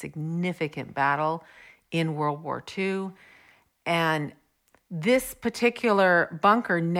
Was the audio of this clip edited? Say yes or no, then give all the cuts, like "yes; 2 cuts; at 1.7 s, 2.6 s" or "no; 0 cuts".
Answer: no; 0 cuts